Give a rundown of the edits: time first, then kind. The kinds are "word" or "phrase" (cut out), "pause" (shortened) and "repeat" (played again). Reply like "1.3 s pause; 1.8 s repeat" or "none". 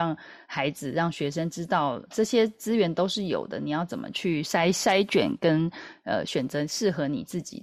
2.1 s word